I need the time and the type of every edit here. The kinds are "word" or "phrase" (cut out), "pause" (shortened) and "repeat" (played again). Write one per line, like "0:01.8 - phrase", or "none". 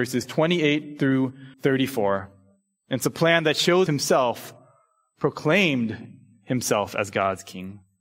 0:01.5 - pause
0:03.9 - phrase